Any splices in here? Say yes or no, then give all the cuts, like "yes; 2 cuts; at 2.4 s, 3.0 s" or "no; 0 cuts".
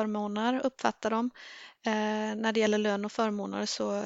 no; 0 cuts